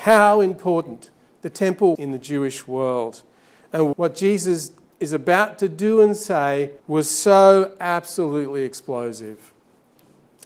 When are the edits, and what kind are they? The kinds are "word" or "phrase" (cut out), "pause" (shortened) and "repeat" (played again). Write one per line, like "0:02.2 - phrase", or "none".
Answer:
0:01.9 - word
0:03.9 - word
0:06.8 - pause